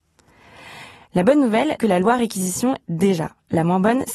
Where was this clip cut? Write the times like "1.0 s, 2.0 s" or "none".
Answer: 1.8 s, 2.8 s